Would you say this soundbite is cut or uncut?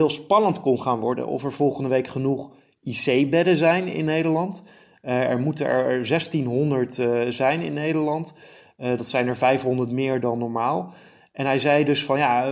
uncut